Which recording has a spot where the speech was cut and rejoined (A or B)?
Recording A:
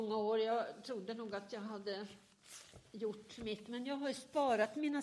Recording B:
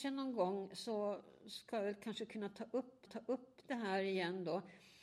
B